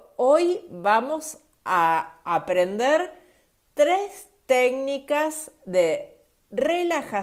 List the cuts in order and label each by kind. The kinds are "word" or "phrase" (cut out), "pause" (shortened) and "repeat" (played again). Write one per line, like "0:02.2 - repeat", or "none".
none